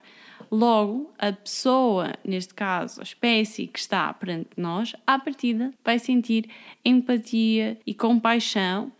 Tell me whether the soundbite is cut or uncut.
cut